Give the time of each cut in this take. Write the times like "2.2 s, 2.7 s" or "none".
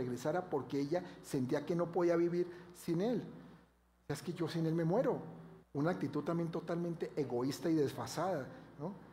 5.6 s